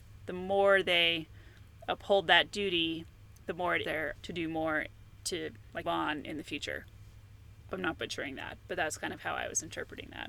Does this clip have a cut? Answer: yes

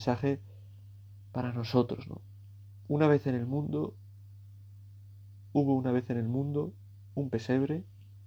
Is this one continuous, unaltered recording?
yes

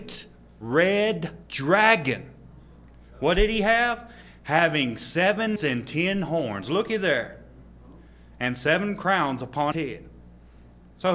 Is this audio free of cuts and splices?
no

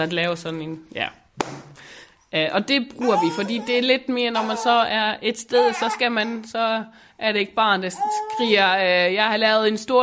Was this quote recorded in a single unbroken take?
yes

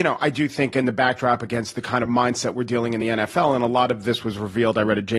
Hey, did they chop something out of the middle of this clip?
no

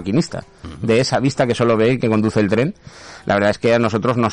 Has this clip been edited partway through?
no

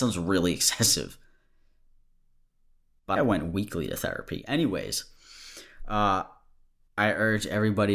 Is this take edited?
yes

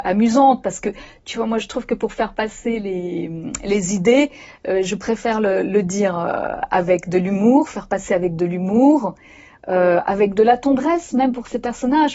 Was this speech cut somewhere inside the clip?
no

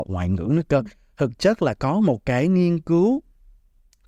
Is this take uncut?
yes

